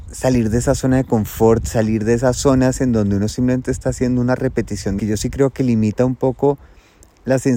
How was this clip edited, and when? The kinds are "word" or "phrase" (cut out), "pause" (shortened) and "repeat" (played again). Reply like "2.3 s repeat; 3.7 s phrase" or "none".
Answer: 5.0 s phrase